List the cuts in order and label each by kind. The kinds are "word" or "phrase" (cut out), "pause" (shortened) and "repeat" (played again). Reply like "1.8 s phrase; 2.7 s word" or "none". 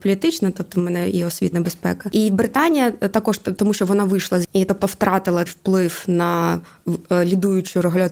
1.5 s word; 4.4 s word; 5.5 s word